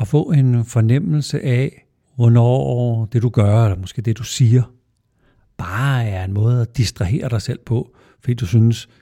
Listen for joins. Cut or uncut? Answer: cut